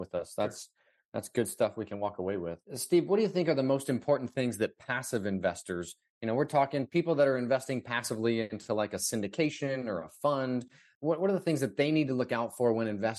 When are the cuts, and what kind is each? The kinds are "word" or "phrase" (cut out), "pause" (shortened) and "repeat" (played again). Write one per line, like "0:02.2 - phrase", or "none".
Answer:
0:02.7 - pause